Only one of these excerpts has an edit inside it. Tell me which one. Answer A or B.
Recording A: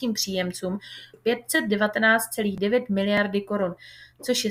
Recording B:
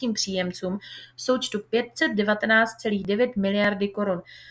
A